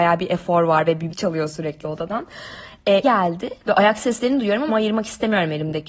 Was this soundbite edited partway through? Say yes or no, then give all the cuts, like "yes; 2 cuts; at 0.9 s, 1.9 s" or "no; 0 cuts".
yes; 4 cuts; at 1.1 s, 3.0 s, 3.6 s, 4.7 s